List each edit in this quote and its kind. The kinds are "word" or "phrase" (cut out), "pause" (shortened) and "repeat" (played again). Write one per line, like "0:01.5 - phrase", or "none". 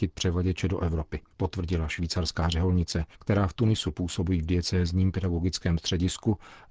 0:01.3 - pause
0:03.1 - pause